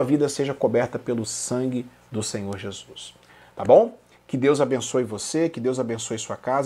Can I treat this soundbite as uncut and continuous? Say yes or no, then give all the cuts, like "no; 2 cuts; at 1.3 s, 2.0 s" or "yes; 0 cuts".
yes; 0 cuts